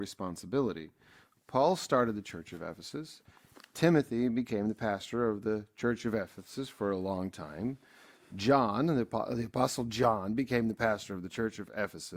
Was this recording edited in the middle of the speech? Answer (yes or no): no